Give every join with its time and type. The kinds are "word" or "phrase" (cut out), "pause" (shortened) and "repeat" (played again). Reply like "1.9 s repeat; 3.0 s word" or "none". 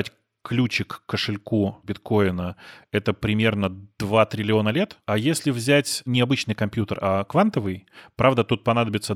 none